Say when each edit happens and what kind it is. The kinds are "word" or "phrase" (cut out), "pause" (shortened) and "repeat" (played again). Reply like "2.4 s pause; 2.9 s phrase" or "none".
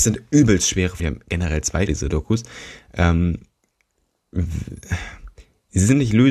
1.0 s word; 1.9 s word